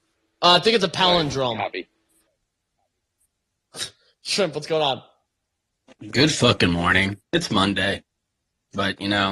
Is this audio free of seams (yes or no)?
yes